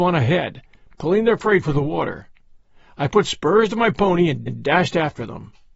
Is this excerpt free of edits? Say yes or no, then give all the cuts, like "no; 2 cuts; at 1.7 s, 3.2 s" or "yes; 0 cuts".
no; 1 cut; at 4.5 s